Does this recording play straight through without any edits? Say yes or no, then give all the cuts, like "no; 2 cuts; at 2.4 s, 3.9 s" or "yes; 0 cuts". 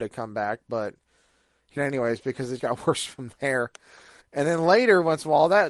no; 3 cuts; at 1.8 s, 2.6 s, 4.2 s